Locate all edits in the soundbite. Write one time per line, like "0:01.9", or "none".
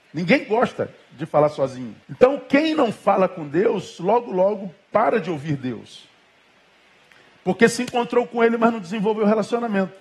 0:02.0